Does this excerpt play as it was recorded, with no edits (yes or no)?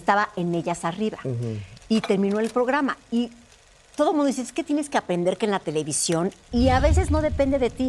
yes